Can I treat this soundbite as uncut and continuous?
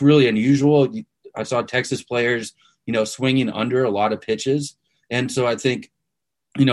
yes; 0 cuts

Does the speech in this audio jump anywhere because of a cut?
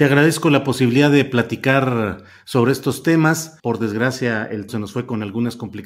yes; 2 cuts; at 3.6 s, 4.7 s

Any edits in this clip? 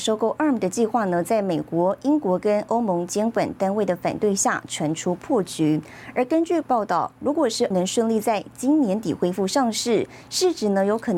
yes; 2 cuts; at 6.6 s, 7.7 s

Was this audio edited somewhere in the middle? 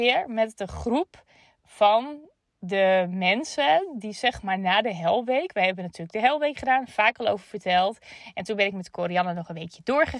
no; 0 cuts

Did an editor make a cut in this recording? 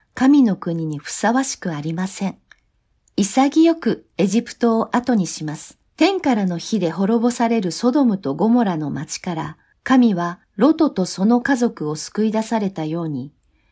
yes; 3 cuts; at 5.9 s, 9.7 s, 10.4 s

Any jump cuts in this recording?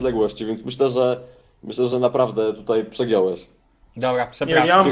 no; 0 cuts

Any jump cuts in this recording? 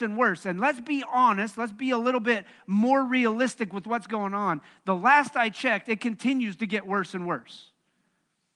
no; 0 cuts

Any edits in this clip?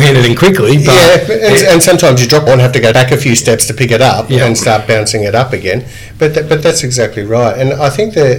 yes; 3 cuts; at 2.5 s, 2.9 s, 6.6 s

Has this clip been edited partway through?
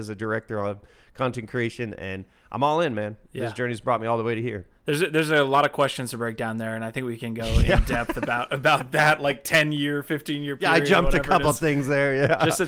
no; 0 cuts

